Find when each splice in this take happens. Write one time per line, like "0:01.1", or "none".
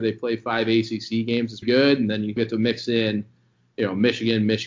0:01.6
0:02.4